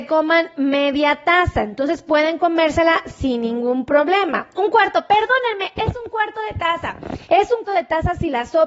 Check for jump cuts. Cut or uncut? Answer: cut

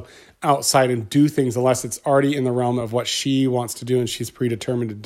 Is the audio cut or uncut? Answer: uncut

